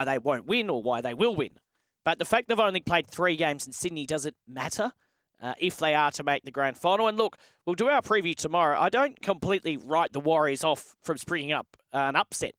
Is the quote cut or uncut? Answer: cut